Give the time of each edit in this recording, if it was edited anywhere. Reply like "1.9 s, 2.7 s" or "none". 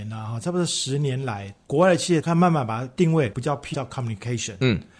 3.7 s

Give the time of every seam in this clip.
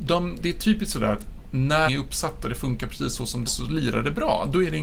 1.9 s, 3.5 s

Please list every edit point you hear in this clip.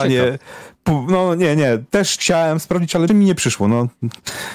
2.2 s, 3.1 s

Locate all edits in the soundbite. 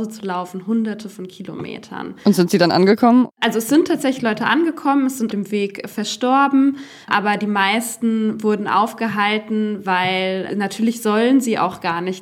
5.3 s, 7.0 s, 10.5 s

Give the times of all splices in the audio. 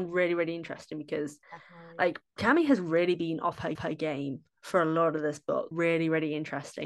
1.4 s, 3.7 s, 5.7 s

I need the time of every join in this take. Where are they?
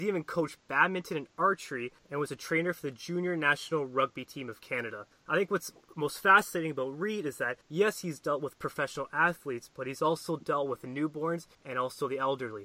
2.0 s, 5.1 s, 7.6 s, 11.5 s

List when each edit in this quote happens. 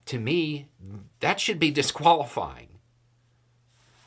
1.1 s

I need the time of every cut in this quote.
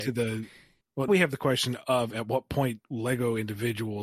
1.1 s, 2.8 s

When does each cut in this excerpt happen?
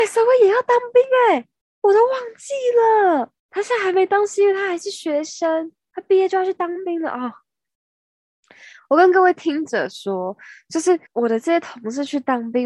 1.6 s, 3.4 s, 11.1 s

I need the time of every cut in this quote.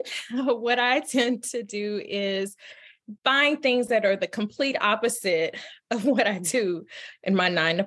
3.2 s

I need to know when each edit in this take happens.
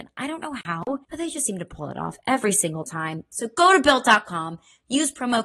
1.0 s

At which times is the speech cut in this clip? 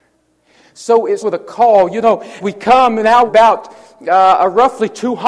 1.2 s, 2.4 s, 3.3 s

